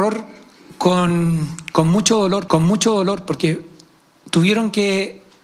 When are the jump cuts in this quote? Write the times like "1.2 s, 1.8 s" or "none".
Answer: 2.5 s